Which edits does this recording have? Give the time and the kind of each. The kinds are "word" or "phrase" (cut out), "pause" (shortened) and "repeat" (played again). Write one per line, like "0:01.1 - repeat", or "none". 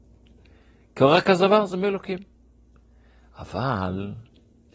none